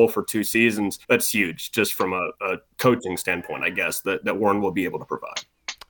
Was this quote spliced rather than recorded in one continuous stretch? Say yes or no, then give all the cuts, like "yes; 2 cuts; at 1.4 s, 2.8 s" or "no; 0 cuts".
yes; 1 cut; at 1.0 s